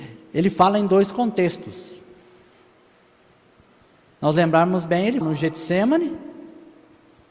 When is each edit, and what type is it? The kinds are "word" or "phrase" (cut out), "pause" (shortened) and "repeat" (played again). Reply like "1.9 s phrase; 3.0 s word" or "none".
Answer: 5.2 s word